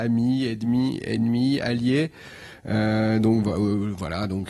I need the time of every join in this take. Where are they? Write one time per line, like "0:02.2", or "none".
none